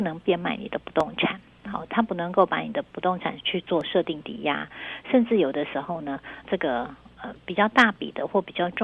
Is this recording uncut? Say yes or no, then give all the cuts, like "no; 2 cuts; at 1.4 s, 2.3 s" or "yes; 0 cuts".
no; 1 cut; at 6.4 s